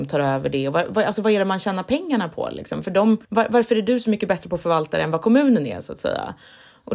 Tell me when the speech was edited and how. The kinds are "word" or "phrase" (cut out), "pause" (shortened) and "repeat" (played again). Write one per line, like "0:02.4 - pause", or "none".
0:03.2 - pause